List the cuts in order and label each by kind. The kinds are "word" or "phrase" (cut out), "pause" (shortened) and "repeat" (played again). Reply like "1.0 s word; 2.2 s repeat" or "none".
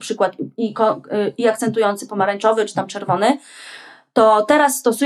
none